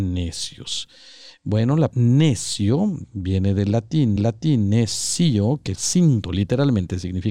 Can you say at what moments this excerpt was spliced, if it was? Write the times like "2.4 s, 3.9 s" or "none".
1.9 s, 4.2 s, 5.8 s, 6.2 s

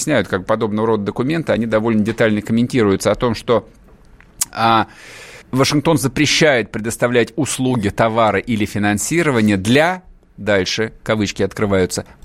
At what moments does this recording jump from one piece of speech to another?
5.4 s

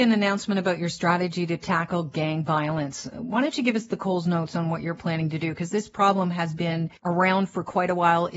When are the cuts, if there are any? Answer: 7.0 s

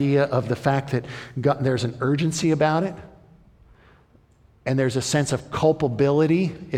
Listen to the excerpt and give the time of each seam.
none

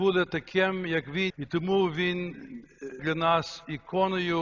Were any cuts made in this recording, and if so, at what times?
1.3 s, 3.0 s

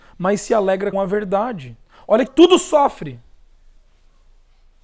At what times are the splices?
0.9 s, 2.3 s

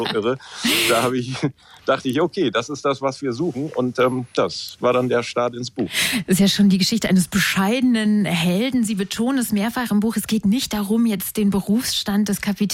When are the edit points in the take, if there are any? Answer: none

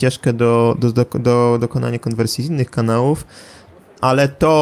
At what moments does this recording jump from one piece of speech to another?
none

